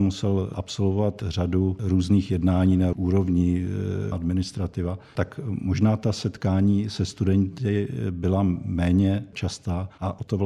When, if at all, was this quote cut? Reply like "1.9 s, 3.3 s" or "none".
2.9 s, 4.1 s